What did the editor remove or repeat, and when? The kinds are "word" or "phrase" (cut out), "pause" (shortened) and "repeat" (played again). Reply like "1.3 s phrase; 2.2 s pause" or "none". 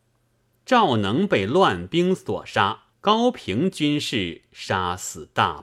2.9 s pause